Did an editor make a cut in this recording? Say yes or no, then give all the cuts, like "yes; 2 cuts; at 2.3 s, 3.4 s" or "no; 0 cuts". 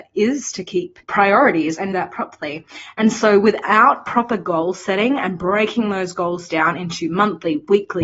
yes; 2 cuts; at 1.0 s, 1.9 s